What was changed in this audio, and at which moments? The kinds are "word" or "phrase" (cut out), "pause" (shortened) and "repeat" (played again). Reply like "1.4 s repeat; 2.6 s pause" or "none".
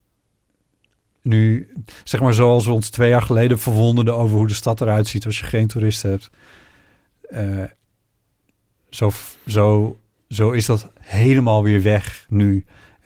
none